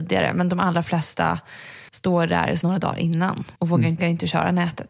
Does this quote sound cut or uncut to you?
cut